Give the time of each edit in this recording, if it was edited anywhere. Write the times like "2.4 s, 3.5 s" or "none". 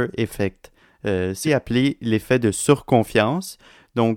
1.4 s